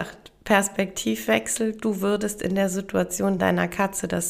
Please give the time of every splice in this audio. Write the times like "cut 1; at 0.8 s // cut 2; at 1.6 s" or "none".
none